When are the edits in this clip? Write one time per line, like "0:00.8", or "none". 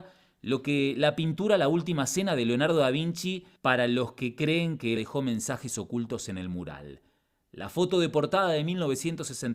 0:03.6
0:05.0